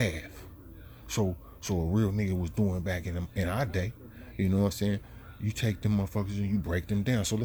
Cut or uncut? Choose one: uncut